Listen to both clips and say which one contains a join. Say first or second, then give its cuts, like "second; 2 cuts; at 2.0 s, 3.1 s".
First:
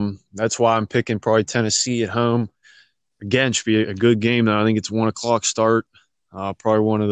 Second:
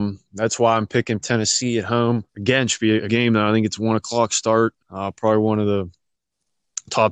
second; 4 cuts; at 1.2 s, 2.3 s, 3.1 s, 4.8 s